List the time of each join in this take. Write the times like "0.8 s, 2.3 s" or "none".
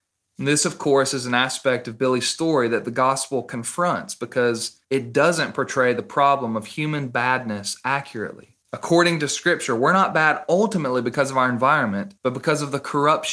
4.8 s, 8.6 s, 12.2 s